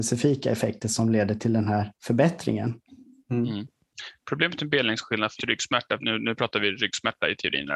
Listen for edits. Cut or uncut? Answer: cut